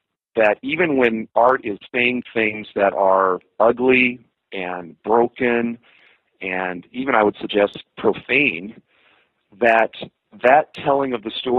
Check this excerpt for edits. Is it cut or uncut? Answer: uncut